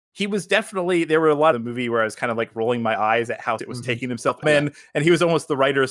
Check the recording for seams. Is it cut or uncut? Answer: cut